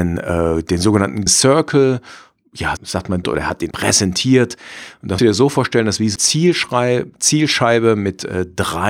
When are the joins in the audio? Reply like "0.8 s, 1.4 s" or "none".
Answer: 1.3 s, 2.8 s, 3.2 s, 3.7 s, 5.2 s, 6.2 s